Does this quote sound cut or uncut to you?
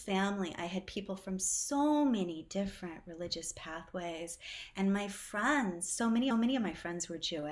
cut